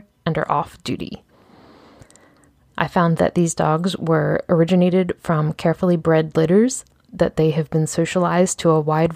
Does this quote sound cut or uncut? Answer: uncut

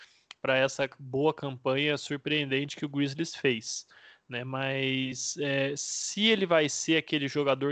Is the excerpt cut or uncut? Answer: uncut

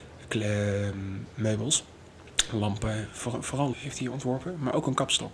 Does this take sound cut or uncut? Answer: cut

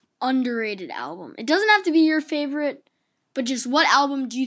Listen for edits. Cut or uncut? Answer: uncut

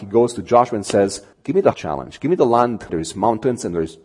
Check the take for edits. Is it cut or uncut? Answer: cut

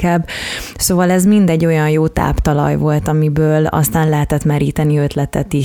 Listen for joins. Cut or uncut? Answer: uncut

